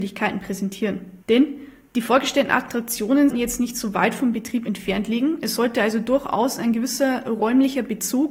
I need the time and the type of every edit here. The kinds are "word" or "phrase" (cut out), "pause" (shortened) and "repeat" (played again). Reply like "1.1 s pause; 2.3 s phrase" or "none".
1.2 s pause; 3.3 s word